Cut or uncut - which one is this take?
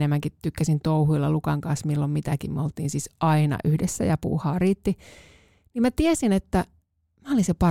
uncut